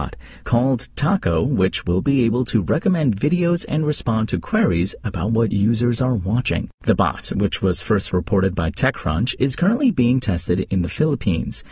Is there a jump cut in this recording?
yes; 1 cut; at 6.7 s

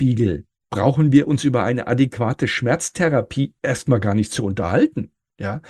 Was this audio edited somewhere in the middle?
no; 0 cuts

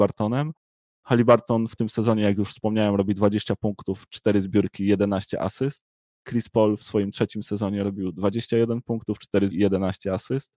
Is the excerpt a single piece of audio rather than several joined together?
no; 1 cut; at 9.5 s

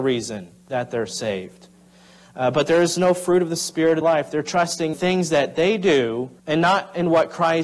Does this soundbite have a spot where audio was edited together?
yes; 3 cuts; at 4.0 s, 4.9 s, 6.4 s

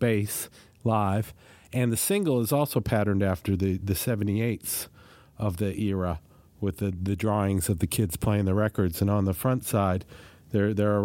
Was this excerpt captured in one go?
yes; 0 cuts

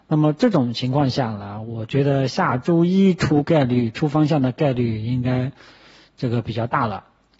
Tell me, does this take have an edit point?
no; 0 cuts

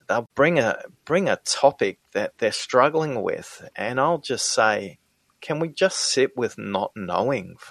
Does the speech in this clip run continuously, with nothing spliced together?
no; 1 cut; at 2.0 s

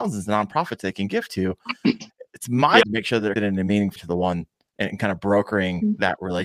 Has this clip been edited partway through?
yes; 3 cuts; at 2.8 s, 3.4 s, 4.0 s

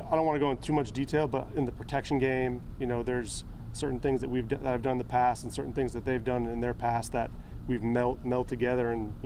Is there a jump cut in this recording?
no; 0 cuts

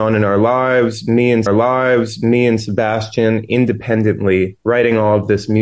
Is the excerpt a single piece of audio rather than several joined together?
no; 2 cuts; at 1.5 s, 4.6 s

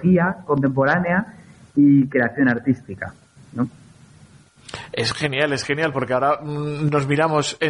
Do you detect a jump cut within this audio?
no; 0 cuts

